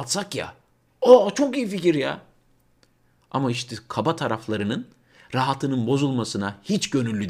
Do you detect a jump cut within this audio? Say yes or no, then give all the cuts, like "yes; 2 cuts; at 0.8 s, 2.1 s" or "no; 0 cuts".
no; 0 cuts